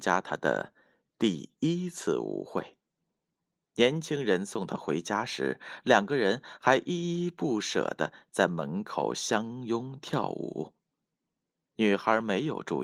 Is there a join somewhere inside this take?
no; 0 cuts

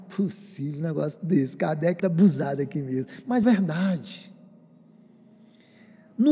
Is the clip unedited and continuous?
no; 2 cuts; at 2.0 s, 3.4 s

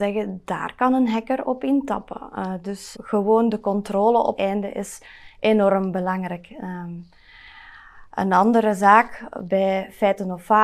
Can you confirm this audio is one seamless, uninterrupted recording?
no; 2 cuts; at 2.9 s, 4.4 s

